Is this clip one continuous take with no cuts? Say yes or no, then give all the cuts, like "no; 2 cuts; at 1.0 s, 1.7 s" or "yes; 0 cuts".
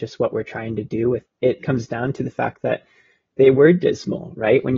no; 2 cuts; at 1.2 s, 1.6 s